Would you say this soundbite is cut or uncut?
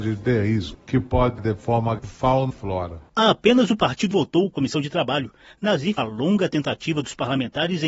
cut